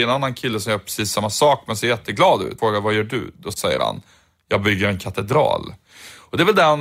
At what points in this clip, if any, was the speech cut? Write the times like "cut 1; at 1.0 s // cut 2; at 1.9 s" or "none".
cut 1; at 2.6 s